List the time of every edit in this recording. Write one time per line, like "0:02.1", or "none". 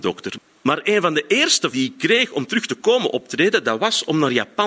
0:01.7